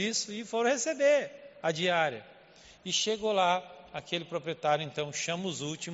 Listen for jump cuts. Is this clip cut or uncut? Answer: uncut